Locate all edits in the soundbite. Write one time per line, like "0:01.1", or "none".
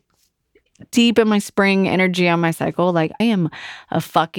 0:03.2